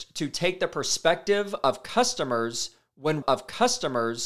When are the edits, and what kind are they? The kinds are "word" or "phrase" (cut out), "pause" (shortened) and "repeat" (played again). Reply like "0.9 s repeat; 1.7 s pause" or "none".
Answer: 3.2 s repeat